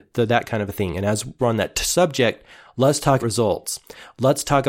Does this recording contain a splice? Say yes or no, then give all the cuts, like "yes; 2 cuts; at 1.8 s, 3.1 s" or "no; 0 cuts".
yes; 2 cuts; at 1.4 s, 3.2 s